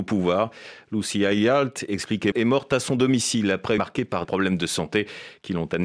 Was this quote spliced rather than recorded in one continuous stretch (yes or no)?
yes